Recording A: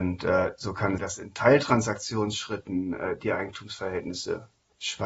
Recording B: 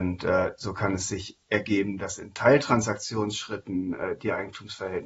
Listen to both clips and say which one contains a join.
A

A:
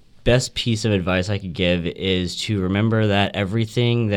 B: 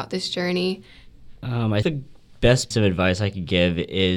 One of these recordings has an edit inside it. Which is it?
B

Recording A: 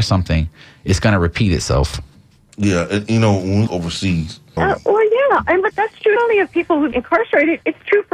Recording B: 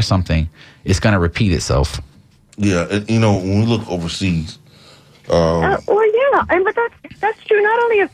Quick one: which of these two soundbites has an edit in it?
A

